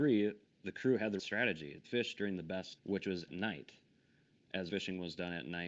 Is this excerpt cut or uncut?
cut